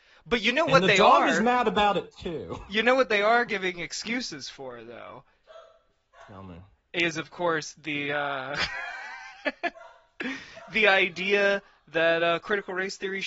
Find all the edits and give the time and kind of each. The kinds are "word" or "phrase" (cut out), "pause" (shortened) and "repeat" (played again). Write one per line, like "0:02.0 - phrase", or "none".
none